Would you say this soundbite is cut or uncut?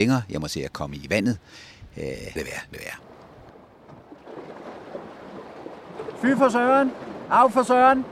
cut